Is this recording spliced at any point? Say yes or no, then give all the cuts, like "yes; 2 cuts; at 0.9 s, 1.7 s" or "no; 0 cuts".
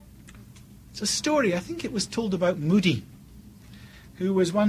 no; 0 cuts